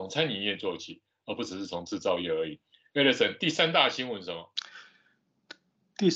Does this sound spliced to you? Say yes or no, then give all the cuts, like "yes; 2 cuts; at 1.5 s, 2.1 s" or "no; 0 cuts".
no; 0 cuts